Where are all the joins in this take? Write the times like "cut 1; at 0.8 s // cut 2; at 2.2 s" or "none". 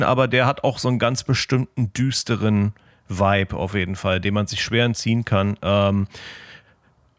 none

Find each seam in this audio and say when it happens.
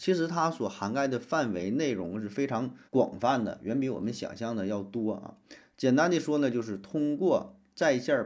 cut 1; at 2.8 s

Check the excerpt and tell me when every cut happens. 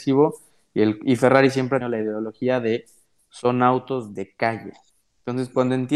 cut 1; at 1.8 s

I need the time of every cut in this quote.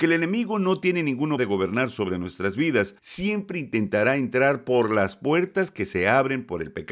cut 1; at 1.4 s // cut 2; at 3.0 s

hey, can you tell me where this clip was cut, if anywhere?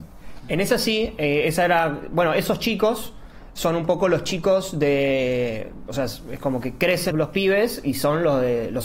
cut 1; at 7.1 s

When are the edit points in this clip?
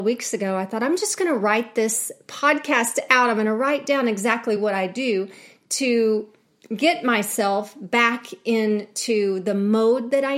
none

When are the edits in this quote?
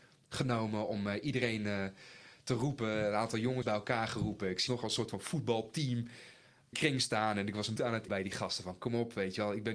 cut 1; at 3.6 s // cut 2; at 4.7 s // cut 3; at 6.7 s // cut 4; at 7.8 s // cut 5; at 8.1 s

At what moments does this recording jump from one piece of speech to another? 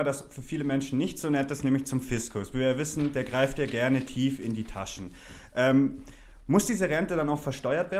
none

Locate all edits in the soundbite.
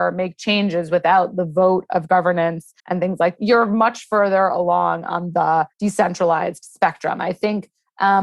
cut 1; at 2.8 s // cut 2; at 3.4 s // cut 3; at 5.7 s

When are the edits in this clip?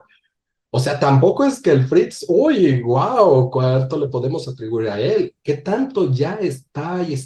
none

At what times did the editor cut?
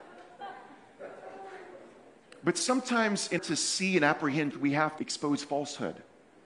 cut 1; at 3.4 s // cut 2; at 4.5 s // cut 3; at 5.0 s

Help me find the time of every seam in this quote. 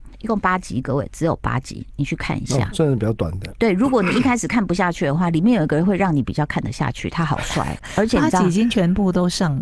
cut 1; at 7.8 s

